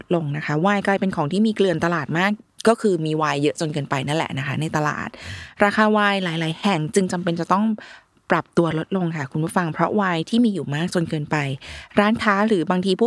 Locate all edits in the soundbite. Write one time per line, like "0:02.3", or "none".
none